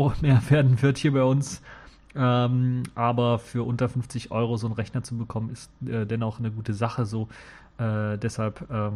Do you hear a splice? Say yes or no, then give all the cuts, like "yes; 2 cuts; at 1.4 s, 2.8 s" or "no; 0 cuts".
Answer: no; 0 cuts